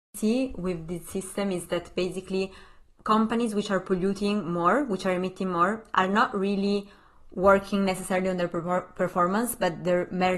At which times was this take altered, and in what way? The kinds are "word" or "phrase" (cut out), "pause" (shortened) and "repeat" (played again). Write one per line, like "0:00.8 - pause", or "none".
none